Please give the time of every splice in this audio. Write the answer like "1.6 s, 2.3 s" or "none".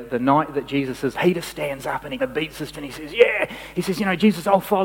1.1 s, 2.2 s, 2.7 s